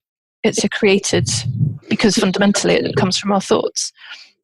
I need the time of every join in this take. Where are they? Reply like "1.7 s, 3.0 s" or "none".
1.8 s, 2.9 s